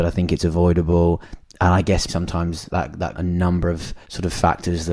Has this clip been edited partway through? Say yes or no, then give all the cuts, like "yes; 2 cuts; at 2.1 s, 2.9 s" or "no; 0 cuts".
yes; 4 cuts; at 2.1 s, 2.7 s, 3.1 s, 4.0 s